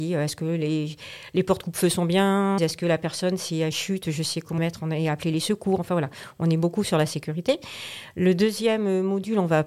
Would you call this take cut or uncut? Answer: cut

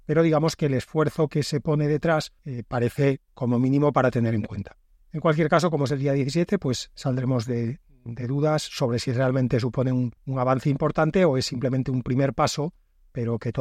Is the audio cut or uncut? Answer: cut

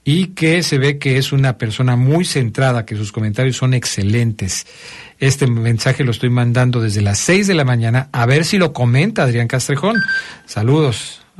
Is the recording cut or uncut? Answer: uncut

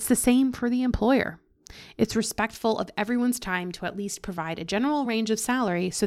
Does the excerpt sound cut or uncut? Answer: uncut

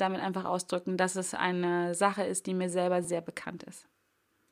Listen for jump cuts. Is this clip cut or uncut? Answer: cut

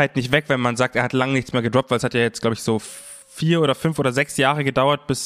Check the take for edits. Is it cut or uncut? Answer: cut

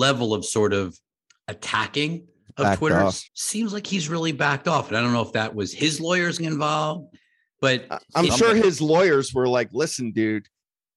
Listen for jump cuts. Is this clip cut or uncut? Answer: cut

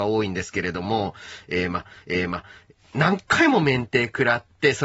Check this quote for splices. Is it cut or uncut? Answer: cut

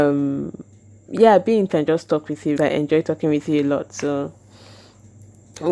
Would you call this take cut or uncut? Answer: cut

